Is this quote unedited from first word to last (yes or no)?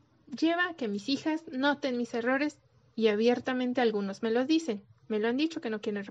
yes